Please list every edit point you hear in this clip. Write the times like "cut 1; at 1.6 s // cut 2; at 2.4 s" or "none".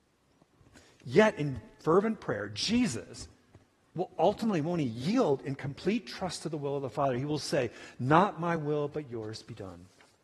none